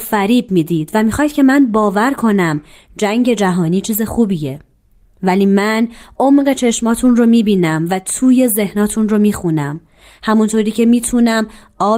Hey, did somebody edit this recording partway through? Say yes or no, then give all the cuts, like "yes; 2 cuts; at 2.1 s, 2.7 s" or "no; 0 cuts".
no; 0 cuts